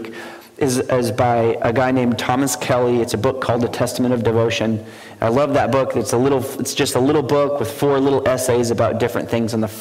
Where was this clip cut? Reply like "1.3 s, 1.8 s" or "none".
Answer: none